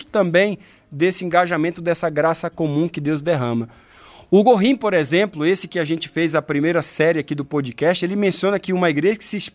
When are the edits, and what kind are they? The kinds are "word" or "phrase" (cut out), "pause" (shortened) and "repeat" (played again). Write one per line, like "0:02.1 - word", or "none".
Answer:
none